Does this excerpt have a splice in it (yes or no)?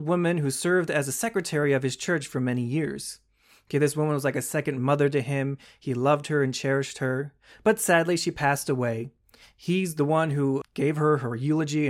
yes